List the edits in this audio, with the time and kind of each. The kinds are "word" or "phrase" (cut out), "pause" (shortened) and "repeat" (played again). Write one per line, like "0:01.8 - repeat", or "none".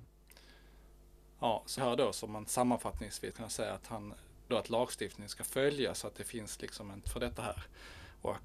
0:01.8 - word
0:03.3 - word
0:04.5 - word
0:07.0 - word